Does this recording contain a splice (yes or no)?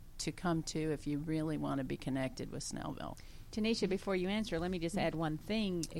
no